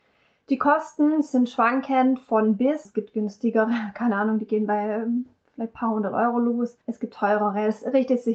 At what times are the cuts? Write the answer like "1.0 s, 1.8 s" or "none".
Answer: 2.9 s, 6.8 s